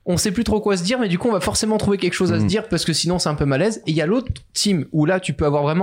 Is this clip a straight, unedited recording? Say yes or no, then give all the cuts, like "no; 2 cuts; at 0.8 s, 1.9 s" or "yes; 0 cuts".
yes; 0 cuts